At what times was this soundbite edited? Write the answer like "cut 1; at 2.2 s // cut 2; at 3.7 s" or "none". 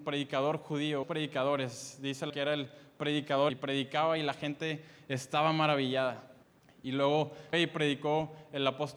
cut 1; at 1.0 s // cut 2; at 2.3 s // cut 3; at 3.5 s // cut 4; at 6.4 s // cut 5; at 7.5 s